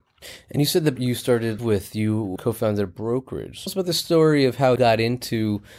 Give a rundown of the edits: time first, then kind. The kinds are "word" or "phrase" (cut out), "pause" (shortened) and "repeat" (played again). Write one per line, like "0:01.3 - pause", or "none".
0:01.0 - word
0:01.6 - word
0:02.4 - word
0:03.7 - word
0:04.8 - word